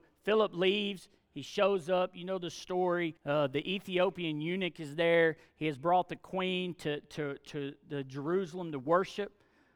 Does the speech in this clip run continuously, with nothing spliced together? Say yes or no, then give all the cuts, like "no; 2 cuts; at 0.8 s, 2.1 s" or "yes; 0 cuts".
no; 1 cut; at 3.2 s